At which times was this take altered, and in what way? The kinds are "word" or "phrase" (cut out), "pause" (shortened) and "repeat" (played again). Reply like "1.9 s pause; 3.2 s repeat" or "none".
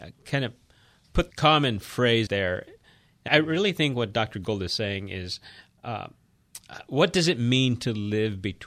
1.3 s word; 2.3 s word; 3.3 s word